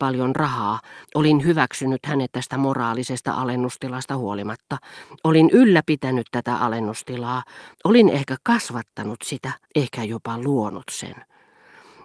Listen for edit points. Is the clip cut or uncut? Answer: cut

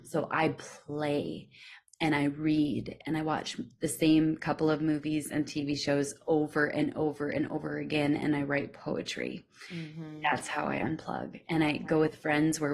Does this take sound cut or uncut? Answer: uncut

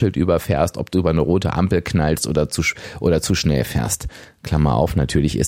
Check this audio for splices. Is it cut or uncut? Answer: uncut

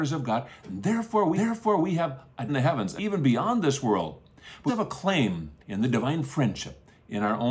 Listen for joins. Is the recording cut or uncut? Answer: cut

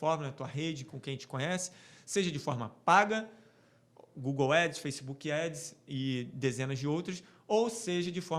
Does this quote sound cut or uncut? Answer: uncut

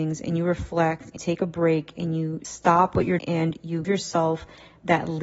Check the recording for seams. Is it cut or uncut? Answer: cut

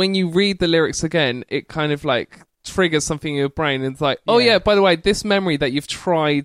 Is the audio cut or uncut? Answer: cut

